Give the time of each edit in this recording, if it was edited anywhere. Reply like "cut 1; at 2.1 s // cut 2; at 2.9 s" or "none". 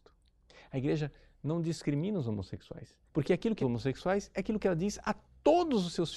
cut 1; at 3.1 s // cut 2; at 3.6 s

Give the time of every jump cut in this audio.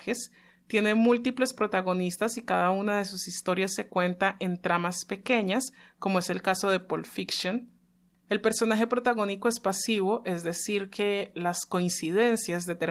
cut 1; at 8.1 s

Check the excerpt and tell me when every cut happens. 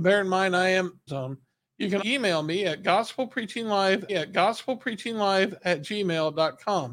cut 1; at 1.1 s // cut 2; at 2.0 s // cut 3; at 4.1 s

